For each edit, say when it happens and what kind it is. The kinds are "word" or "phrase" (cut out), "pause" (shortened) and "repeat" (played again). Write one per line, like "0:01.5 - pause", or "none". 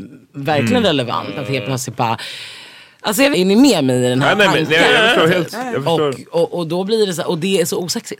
0:03.3 - phrase